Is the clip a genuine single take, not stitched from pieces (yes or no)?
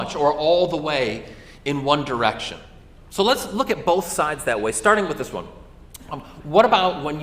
yes